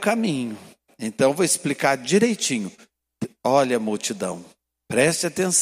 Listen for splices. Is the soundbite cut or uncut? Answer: uncut